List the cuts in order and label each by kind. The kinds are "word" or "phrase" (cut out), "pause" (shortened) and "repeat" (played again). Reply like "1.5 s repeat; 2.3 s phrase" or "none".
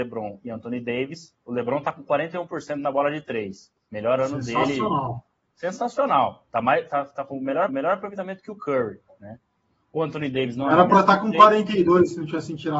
7.7 s repeat